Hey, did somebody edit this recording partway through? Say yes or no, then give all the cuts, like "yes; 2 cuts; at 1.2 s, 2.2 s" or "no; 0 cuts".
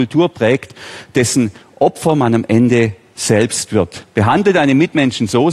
no; 0 cuts